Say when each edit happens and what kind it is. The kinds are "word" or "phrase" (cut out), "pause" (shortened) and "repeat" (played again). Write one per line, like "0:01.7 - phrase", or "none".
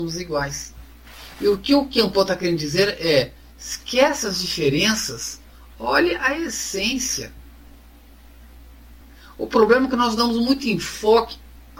none